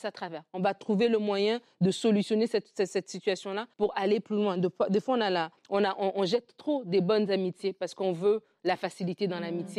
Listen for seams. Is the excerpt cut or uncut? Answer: cut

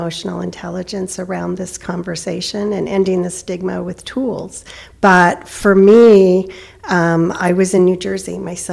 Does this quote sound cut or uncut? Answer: uncut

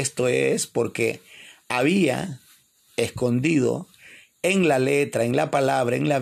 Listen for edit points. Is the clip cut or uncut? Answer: uncut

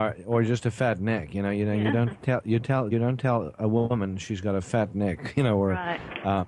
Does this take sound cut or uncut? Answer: cut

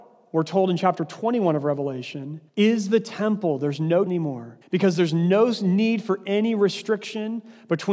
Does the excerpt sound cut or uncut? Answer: cut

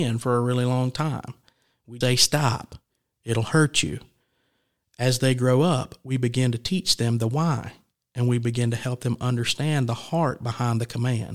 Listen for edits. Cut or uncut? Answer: cut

